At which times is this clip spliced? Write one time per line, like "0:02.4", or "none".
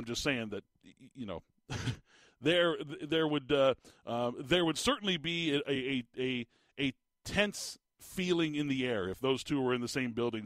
none